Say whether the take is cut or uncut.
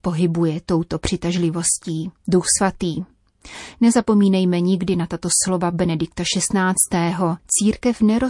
cut